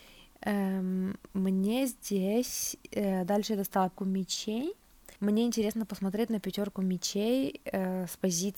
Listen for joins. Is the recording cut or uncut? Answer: cut